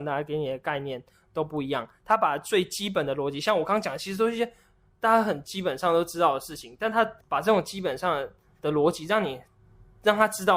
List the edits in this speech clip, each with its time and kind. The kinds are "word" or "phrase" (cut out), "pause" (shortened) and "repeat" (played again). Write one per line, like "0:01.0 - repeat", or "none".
0:07.2 - pause